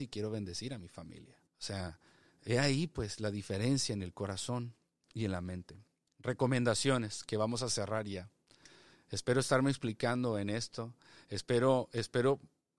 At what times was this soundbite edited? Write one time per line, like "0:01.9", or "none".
0:01.5